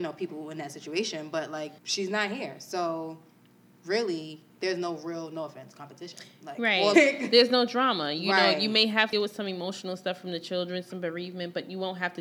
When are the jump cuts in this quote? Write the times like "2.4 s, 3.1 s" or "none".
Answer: 1.8 s, 6.9 s, 9.1 s